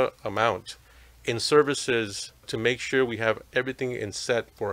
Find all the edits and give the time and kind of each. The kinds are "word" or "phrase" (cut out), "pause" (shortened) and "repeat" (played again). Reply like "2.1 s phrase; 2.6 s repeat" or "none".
2.4 s word